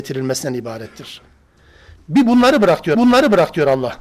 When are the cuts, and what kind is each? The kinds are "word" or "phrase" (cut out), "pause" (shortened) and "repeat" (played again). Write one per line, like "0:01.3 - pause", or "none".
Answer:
0:02.9 - repeat